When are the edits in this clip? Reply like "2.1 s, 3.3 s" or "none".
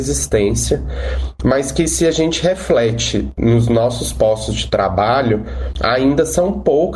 none